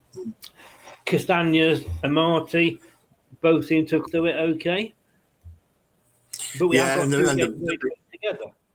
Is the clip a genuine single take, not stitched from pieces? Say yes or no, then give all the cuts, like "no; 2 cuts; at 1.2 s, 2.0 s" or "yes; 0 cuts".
no; 1 cut; at 4.1 s